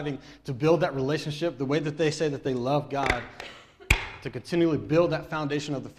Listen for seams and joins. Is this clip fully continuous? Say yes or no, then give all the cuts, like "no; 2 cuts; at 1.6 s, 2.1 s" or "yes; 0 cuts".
yes; 0 cuts